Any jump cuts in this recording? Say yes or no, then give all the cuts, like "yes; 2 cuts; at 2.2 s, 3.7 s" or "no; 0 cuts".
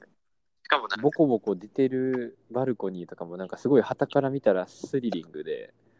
yes; 1 cut; at 2.4 s